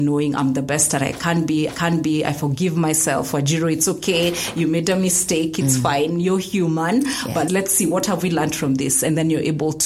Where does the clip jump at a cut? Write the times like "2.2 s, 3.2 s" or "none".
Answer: 1.7 s, 7.5 s